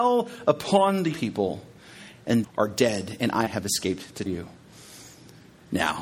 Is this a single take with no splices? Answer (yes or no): no